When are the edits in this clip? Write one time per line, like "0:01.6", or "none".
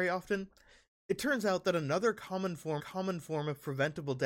0:02.8